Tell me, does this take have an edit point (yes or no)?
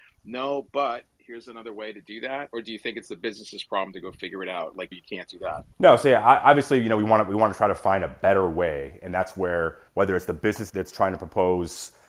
yes